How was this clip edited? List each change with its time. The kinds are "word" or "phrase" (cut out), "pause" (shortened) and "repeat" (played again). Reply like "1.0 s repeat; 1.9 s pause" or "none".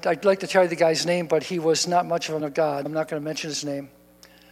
2.4 s word; 2.9 s word